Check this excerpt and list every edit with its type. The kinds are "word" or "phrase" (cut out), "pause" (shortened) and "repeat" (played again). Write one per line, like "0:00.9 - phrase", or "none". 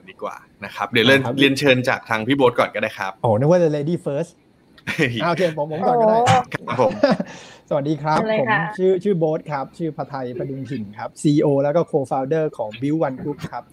0:03.2 - pause